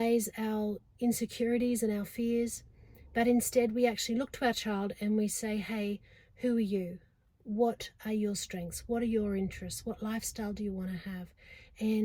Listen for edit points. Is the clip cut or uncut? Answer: uncut